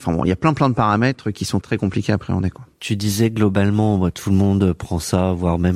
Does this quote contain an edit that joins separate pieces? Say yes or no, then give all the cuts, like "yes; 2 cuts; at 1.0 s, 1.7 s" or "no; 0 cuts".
yes; 1 cut; at 1.6 s